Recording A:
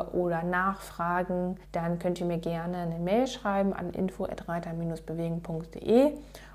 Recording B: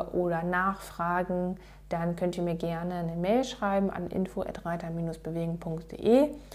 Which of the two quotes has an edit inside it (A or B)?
A